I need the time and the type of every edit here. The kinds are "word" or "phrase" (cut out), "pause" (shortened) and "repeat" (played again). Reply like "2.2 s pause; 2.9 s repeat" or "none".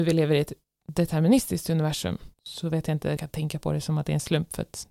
2.3 s pause; 3.2 s phrase